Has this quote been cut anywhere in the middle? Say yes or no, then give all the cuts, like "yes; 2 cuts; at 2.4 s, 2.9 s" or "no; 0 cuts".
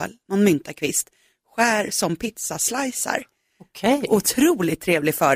no; 0 cuts